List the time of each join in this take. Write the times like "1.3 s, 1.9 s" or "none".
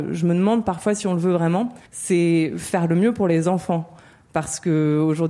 1.9 s